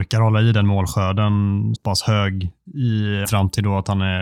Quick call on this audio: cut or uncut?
cut